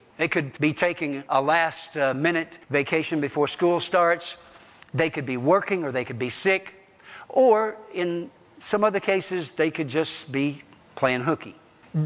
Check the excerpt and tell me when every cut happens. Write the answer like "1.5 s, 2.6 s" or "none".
none